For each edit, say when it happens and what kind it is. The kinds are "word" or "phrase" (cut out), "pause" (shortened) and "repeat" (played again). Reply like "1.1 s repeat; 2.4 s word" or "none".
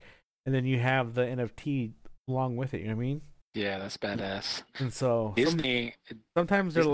2.2 s pause; 3.4 s pause